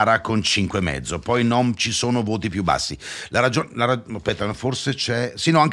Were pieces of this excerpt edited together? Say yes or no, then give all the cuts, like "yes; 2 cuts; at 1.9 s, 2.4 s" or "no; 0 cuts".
no; 0 cuts